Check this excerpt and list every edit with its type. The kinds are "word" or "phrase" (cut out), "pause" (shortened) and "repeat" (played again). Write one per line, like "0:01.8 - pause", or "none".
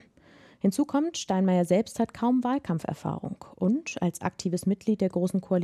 none